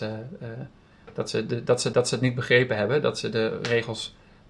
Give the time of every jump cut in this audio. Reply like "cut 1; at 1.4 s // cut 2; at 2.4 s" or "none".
cut 1; at 1.9 s